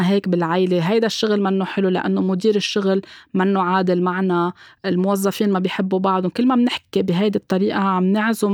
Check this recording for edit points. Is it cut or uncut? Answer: uncut